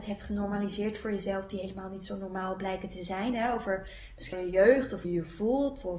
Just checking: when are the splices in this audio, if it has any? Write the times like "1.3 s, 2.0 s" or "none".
4.3 s, 5.0 s